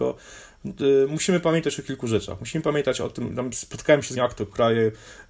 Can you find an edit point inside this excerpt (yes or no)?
yes